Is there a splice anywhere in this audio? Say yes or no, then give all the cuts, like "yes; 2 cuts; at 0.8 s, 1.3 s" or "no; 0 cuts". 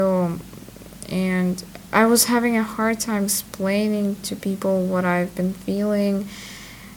no; 0 cuts